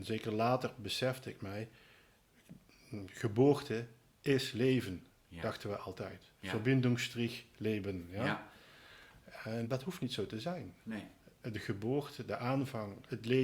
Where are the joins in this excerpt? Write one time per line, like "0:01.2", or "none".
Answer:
0:09.6